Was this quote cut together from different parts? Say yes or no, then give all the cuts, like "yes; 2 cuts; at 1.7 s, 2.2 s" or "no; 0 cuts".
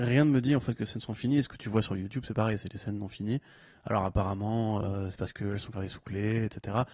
no; 0 cuts